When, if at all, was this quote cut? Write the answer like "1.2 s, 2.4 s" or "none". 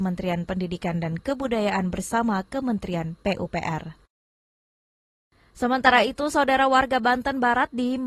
none